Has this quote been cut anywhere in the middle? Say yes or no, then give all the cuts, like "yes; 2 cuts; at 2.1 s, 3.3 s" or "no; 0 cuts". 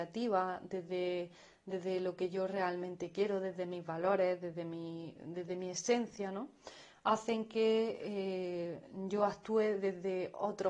no; 0 cuts